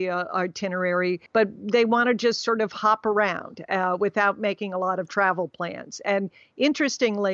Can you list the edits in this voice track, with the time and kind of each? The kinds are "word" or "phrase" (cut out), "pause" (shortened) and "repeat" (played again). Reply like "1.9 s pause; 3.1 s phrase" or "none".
1.3 s pause